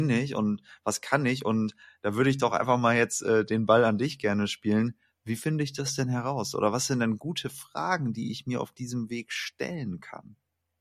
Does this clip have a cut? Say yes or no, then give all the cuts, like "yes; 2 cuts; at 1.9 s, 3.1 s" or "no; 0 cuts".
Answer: no; 0 cuts